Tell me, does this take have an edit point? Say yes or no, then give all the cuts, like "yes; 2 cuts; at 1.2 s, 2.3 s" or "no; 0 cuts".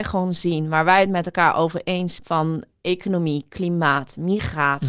yes; 1 cut; at 2.2 s